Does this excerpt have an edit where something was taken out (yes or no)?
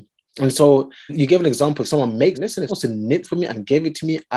yes